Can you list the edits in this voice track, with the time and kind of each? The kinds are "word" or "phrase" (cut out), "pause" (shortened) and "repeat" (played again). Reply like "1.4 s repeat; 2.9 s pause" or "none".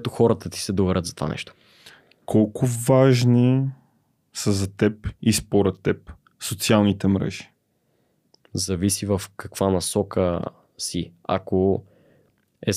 none